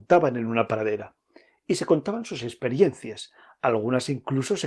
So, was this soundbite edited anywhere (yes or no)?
no